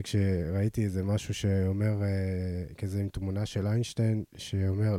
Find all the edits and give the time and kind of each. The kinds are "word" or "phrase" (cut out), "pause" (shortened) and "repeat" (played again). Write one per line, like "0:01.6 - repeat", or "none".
none